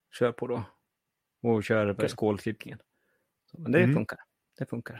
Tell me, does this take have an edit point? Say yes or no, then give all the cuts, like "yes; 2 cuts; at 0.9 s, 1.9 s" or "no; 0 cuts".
no; 0 cuts